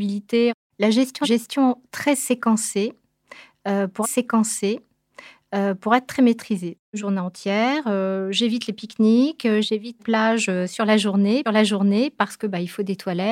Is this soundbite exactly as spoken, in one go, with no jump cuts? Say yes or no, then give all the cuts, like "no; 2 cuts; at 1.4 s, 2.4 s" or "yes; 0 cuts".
no; 5 cuts; at 1.2 s, 4.0 s, 7.0 s, 10.0 s, 11.4 s